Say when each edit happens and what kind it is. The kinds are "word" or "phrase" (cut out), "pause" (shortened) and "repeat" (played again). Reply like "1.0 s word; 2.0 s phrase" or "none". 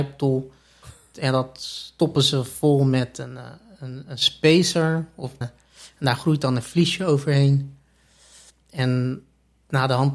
5.4 s word